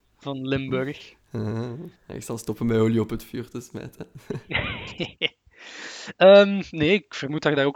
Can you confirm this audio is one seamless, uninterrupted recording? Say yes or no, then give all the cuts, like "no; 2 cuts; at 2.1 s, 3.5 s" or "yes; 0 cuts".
no; 1 cut; at 2.0 s